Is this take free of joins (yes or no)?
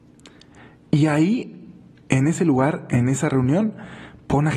yes